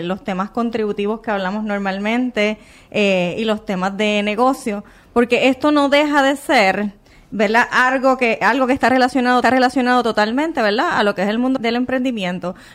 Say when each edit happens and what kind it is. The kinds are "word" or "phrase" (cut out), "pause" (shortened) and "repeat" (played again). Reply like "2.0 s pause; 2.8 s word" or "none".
9.4 s repeat; 11.6 s word